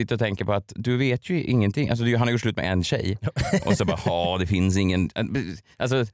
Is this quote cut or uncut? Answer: uncut